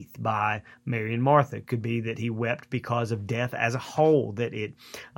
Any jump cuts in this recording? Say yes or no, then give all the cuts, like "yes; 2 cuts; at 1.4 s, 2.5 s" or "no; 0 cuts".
no; 0 cuts